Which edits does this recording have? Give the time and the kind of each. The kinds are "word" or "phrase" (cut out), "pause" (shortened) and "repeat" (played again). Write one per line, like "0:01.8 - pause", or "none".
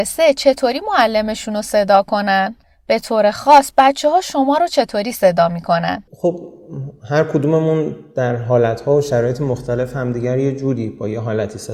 0:02.6 - pause
0:06.1 - pause